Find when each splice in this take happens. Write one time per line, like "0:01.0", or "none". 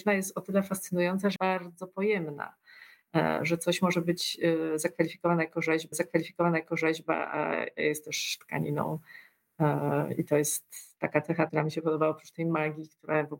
0:01.4
0:05.9
0:11.0
0:11.5